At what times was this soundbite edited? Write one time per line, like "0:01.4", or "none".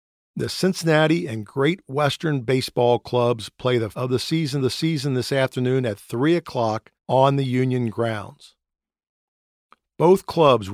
0:03.9
0:04.6
0:06.9